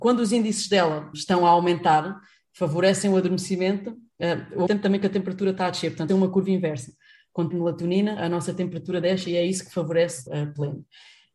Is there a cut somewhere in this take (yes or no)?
yes